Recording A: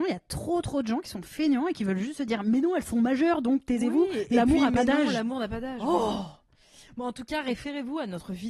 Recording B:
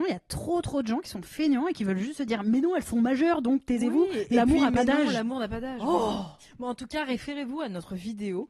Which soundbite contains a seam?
B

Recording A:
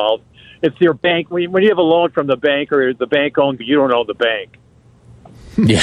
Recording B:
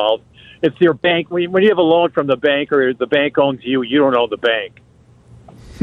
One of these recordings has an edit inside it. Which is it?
A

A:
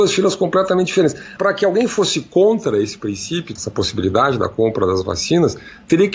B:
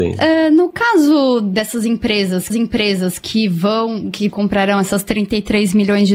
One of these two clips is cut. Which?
B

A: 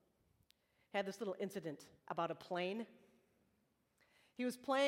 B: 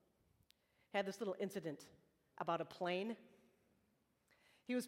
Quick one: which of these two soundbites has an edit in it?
A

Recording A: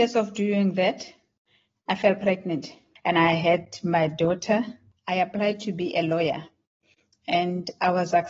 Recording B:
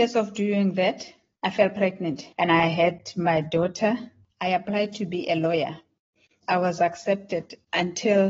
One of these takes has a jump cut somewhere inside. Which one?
B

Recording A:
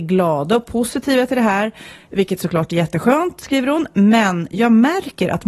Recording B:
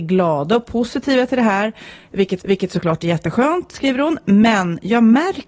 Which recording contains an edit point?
B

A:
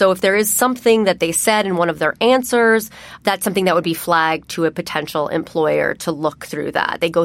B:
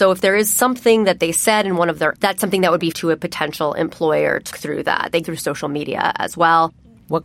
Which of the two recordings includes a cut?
B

